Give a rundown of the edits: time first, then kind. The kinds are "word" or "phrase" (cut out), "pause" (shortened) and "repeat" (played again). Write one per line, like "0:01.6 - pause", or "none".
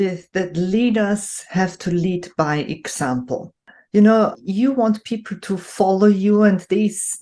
none